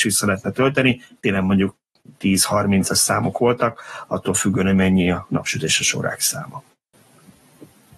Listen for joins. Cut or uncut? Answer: uncut